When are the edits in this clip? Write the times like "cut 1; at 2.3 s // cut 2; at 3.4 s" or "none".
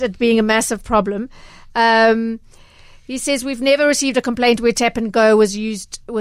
none

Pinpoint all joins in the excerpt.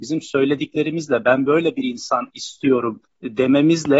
cut 1; at 3.0 s

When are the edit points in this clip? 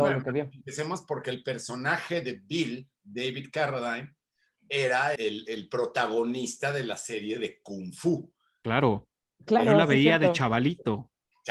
cut 1; at 5.2 s

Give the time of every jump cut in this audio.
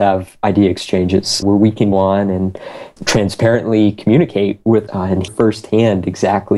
cut 1; at 1.4 s // cut 2; at 1.9 s // cut 3; at 3.0 s // cut 4; at 4.9 s // cut 5; at 5.3 s

